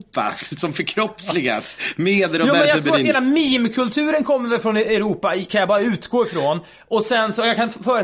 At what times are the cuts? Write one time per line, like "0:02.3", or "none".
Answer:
none